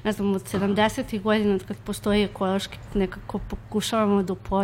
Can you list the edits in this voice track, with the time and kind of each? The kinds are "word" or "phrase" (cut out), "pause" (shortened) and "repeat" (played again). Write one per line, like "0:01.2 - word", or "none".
0:02.9 - word